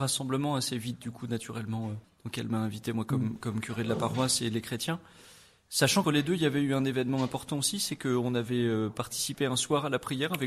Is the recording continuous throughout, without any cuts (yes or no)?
no